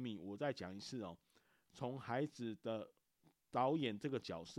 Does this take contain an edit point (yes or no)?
no